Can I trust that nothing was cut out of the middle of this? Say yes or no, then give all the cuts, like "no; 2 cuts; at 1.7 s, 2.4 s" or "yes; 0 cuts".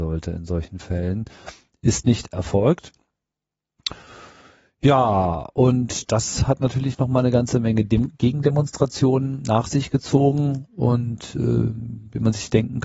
yes; 0 cuts